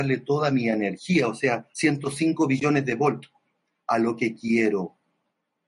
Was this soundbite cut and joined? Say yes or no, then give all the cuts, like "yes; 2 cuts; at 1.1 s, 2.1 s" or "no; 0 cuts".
yes; 2 cuts; at 1.7 s, 3.6 s